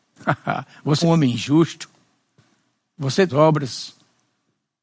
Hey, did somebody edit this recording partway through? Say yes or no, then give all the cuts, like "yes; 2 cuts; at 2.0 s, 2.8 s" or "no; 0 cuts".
yes; 2 cuts; at 1.0 s, 3.3 s